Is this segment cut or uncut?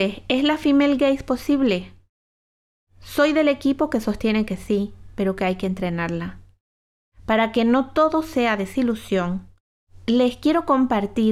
uncut